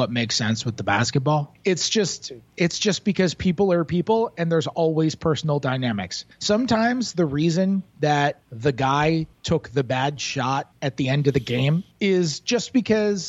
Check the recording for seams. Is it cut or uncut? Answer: uncut